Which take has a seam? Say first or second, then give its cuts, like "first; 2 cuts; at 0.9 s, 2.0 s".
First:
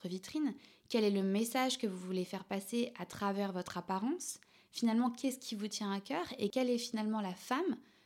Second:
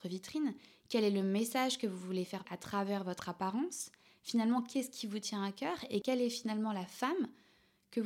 second; 1 cut; at 2.4 s